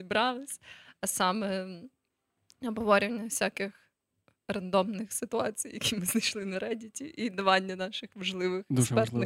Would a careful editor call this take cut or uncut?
uncut